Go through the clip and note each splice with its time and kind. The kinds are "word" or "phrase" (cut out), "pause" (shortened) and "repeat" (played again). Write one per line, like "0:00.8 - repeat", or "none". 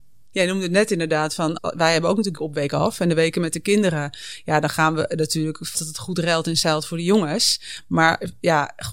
0:01.6 - word
0:02.4 - word
0:05.7 - word